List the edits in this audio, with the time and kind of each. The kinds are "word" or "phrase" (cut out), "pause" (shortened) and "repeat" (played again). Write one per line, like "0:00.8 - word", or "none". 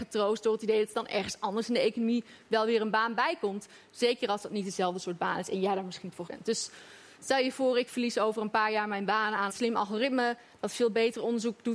0:06.3 - word
0:09.5 - word